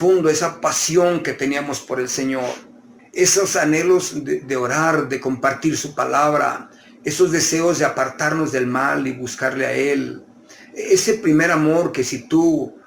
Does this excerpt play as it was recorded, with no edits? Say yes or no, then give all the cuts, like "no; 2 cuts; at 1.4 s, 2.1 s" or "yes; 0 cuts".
no; 1 cut; at 3.0 s